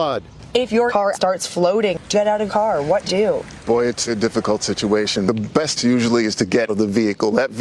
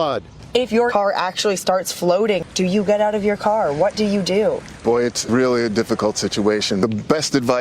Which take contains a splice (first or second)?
first